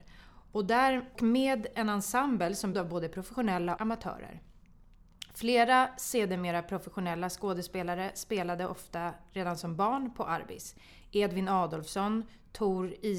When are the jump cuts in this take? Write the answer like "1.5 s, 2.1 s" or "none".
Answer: 1.1 s, 2.7 s, 3.8 s